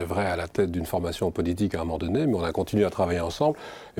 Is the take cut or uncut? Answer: uncut